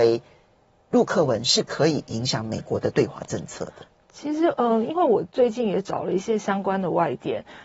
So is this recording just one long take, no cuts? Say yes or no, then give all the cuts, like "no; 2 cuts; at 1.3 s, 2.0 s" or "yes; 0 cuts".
yes; 0 cuts